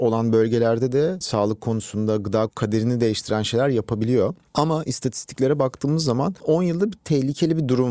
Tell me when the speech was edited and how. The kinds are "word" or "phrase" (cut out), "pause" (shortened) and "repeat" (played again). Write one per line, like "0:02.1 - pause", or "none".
0:01.2 - word
0:02.5 - word
0:06.4 - word